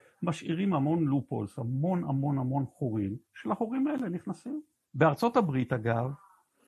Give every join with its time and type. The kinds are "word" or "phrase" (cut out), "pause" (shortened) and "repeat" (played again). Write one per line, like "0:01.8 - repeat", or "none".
0:03.2 - pause
0:04.8 - pause